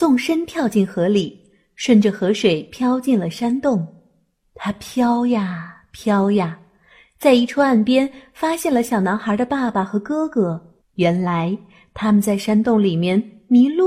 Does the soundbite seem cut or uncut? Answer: cut